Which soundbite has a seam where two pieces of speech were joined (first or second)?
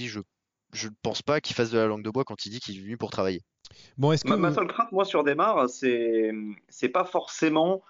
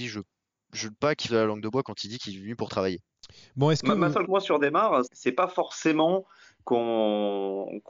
second